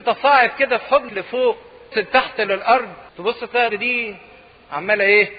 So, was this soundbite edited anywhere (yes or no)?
yes